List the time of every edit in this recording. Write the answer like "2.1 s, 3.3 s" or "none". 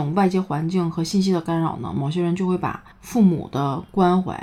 2.9 s